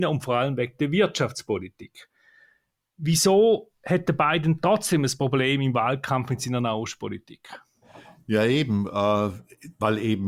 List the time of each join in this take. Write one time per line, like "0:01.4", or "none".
none